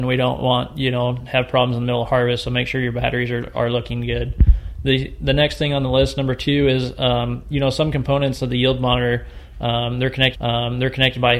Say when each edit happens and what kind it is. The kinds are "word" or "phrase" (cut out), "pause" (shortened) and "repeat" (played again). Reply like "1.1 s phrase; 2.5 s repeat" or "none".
10.3 s repeat